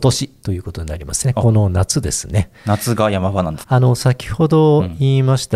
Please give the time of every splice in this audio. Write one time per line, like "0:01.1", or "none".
0:03.6